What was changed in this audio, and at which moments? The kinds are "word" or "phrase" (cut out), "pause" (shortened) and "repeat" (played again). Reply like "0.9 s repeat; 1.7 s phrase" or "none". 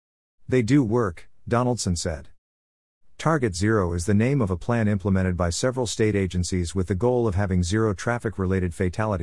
none